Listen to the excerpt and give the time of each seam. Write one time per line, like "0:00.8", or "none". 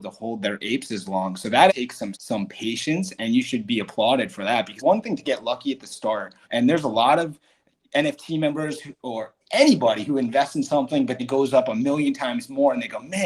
0:01.7
0:02.1
0:04.8
0:06.4
0:09.4
0:11.2